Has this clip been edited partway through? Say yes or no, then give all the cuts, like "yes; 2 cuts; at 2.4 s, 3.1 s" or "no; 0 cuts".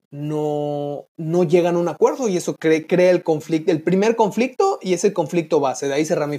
yes; 1 cut; at 1.1 s